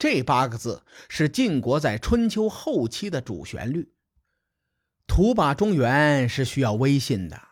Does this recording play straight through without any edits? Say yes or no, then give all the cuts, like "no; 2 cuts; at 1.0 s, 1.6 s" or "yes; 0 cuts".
yes; 0 cuts